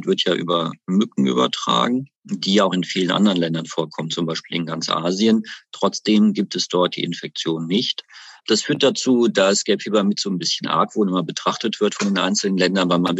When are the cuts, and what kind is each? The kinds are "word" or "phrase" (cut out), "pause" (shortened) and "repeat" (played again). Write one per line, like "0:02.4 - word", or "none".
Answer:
0:02.1 - pause
0:08.4 - pause